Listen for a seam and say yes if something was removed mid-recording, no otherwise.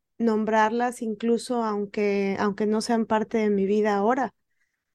no